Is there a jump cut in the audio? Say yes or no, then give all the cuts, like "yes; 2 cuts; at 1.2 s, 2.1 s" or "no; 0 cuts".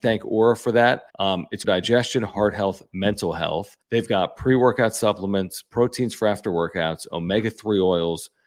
yes; 3 cuts; at 1.1 s, 1.6 s, 3.8 s